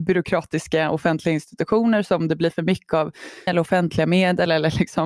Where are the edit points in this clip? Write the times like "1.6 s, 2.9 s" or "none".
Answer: 3.5 s

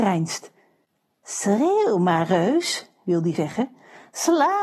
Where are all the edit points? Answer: 3.4 s

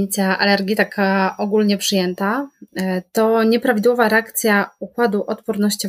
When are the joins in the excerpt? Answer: none

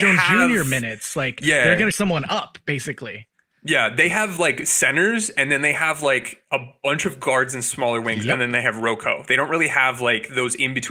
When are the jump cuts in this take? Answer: 1.9 s

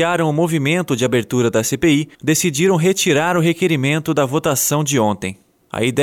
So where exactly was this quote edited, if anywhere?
2.1 s

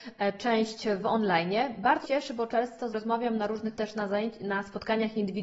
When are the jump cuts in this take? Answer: 2.0 s, 2.9 s, 3.7 s

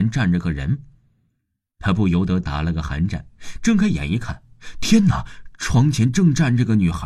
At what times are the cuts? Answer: none

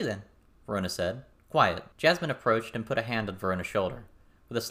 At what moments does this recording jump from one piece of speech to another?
1.9 s

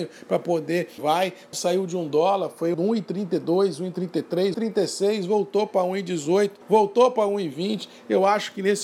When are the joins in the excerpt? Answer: 1.0 s, 1.5 s, 2.7 s, 4.5 s, 6.6 s

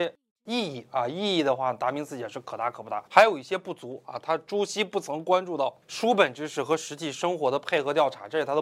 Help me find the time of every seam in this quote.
3.1 s, 5.8 s

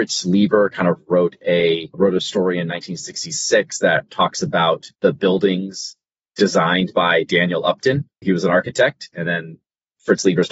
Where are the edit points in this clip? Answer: 4.9 s, 8.2 s

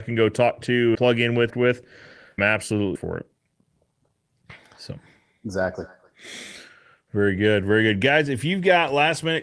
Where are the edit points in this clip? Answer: 0.9 s, 1.5 s, 2.4 s, 3.0 s

